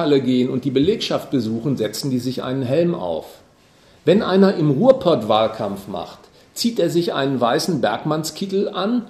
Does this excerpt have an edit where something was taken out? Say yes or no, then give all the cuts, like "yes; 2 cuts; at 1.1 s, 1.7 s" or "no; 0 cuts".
no; 0 cuts